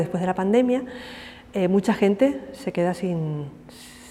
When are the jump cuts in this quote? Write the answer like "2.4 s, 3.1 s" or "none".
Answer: none